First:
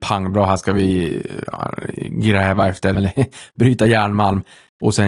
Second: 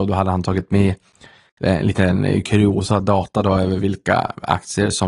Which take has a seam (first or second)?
first